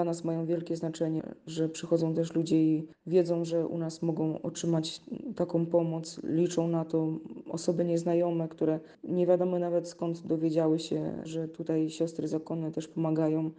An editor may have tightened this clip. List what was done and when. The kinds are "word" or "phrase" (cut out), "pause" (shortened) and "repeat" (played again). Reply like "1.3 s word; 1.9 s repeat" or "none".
none